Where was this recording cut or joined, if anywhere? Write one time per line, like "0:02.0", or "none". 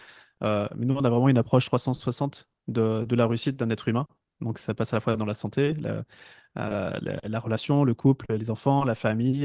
none